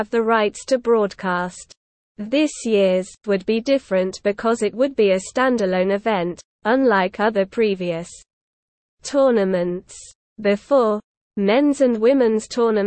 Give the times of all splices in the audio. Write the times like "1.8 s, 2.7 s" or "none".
3.2 s